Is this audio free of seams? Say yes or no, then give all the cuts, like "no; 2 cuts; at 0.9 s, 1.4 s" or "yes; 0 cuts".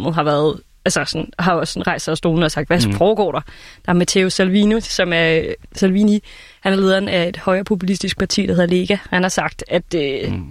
yes; 0 cuts